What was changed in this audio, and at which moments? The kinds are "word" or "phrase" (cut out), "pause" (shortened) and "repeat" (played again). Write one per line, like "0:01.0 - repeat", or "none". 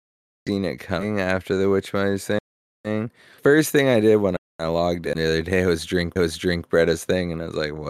0:04.5 - pause
0:05.1 - word
0:06.2 - repeat

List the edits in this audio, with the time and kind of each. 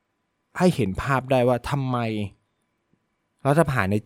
none

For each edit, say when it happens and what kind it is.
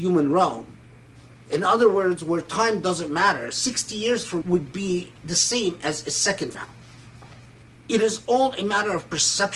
0:04.4 - word
0:05.2 - pause
0:06.5 - word
0:07.6 - pause

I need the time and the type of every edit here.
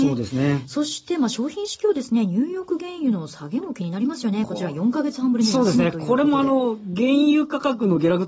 none

